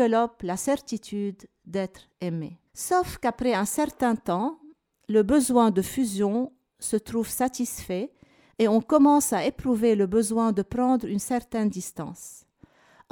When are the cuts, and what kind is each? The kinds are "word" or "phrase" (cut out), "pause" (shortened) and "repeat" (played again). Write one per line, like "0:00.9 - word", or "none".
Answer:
0:02.7 - pause